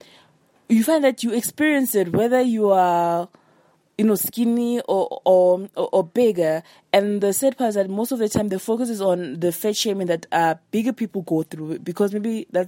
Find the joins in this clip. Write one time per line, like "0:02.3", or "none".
none

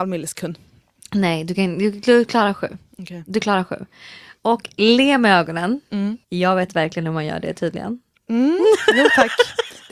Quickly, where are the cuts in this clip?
0:06.2

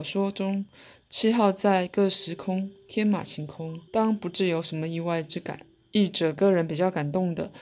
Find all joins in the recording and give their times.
0:03.9
0:05.7

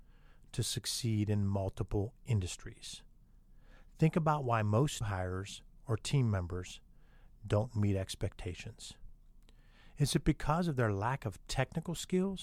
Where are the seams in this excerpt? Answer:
0:05.0

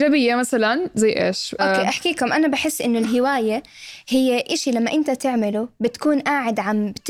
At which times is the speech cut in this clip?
0:01.6

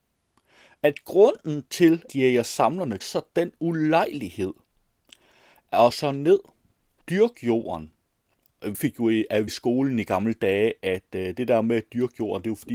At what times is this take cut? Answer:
0:02.1
0:03.0
0:05.9
0:07.0
0:08.7
0:09.5

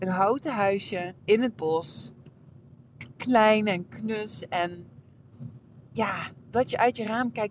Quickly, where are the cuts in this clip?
0:01.2

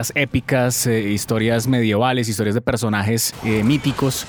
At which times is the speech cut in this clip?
none

